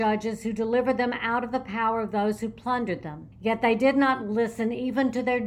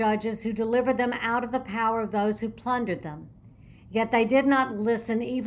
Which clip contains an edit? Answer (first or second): first